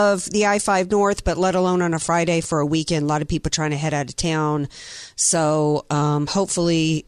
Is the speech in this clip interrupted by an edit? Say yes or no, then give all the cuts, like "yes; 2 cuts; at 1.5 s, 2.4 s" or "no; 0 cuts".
no; 0 cuts